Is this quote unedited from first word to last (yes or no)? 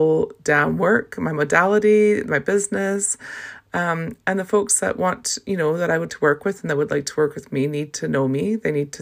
no